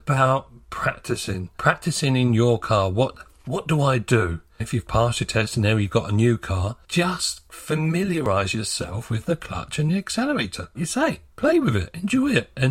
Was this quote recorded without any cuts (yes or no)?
no